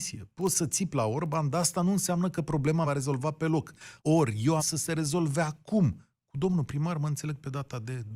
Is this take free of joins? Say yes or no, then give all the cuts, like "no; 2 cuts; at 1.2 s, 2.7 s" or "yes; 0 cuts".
no; 3 cuts; at 2.8 s, 4.0 s, 4.6 s